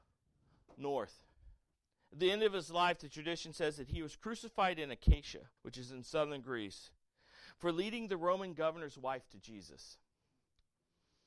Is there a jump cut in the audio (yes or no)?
yes